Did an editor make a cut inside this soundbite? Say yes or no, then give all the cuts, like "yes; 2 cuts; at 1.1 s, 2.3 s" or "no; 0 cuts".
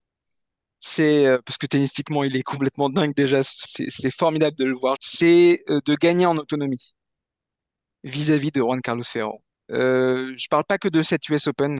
yes; 3 cuts; at 3.6 s, 5.0 s, 9.5 s